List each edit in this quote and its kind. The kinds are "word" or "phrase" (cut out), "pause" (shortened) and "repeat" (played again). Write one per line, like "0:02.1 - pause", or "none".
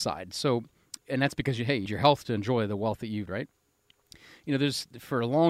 0:01.9 - word
0:03.3 - word